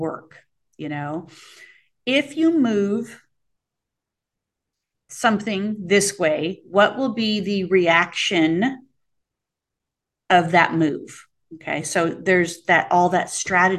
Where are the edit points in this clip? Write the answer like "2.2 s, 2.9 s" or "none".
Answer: none